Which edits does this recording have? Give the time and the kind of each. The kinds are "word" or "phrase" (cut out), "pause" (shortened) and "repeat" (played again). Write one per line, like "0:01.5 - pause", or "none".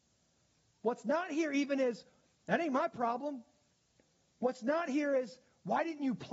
none